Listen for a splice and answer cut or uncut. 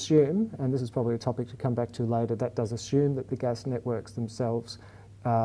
uncut